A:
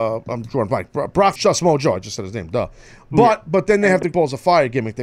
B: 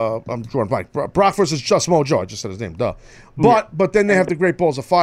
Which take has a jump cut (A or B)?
A